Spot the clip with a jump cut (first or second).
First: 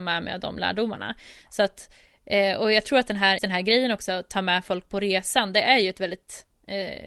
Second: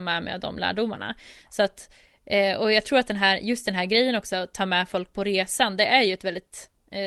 first